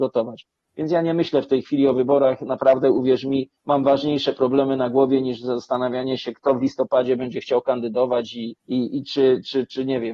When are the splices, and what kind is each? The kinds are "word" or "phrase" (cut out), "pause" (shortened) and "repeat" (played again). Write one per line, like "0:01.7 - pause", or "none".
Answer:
0:03.6 - pause
0:08.6 - pause